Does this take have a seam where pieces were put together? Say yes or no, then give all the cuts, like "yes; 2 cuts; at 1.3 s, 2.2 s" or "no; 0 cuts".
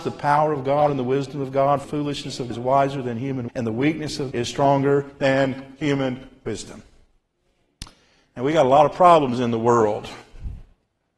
yes; 4 cuts; at 1.8 s, 2.5 s, 3.5 s, 4.3 s